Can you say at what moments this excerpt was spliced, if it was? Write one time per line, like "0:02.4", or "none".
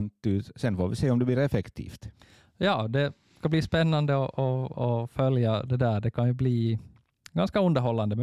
none

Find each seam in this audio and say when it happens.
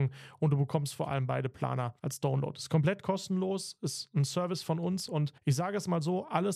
0:02.0
0:05.4

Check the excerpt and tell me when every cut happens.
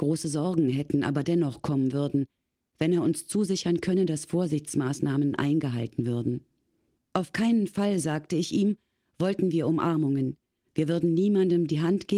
none

